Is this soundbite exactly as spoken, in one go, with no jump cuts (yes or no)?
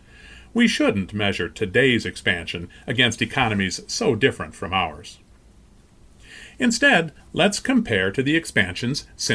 no